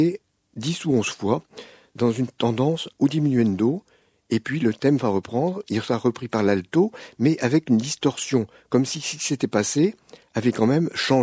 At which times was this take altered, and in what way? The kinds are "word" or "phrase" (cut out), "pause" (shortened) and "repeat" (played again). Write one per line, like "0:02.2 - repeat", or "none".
none